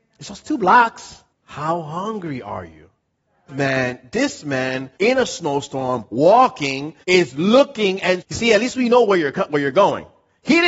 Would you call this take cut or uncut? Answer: cut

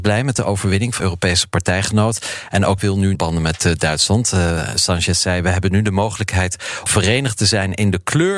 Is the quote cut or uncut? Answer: cut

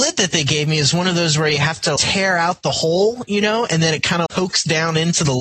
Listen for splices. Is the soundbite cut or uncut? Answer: cut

